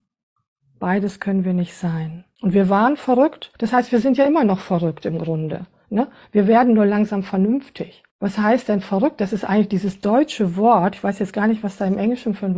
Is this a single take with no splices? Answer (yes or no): no